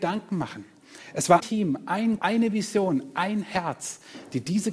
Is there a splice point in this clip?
yes; 2 cuts; at 1.4 s, 2.2 s

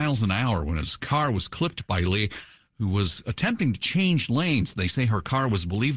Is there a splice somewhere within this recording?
no; 0 cuts

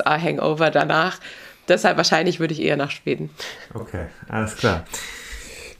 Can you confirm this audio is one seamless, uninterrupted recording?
yes; 0 cuts

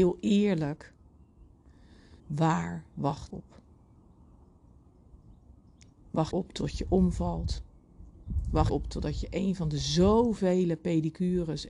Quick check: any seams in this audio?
yes; 4 cuts; at 2.2 s, 3.3 s, 6.3 s, 8.7 s

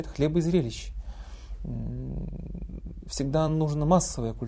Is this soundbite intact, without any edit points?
yes; 0 cuts

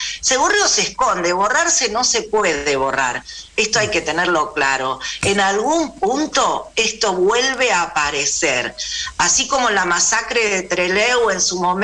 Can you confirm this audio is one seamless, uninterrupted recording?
yes; 0 cuts

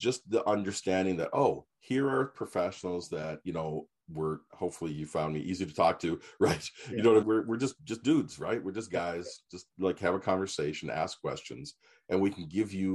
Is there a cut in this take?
yes; 4 cuts; at 1.7 s, 4.5 s, 7.2 s, 7.8 s

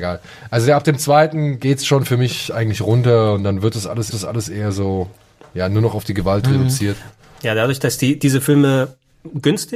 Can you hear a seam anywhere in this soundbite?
yes; 1 cut; at 4.1 s

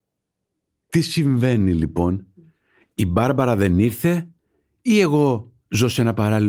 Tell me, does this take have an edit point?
no; 0 cuts

